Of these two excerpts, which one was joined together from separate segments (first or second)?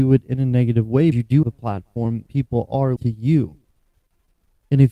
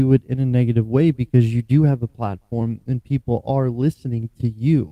first